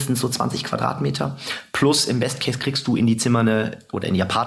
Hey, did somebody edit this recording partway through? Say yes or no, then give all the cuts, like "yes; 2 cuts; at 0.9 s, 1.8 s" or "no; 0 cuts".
no; 0 cuts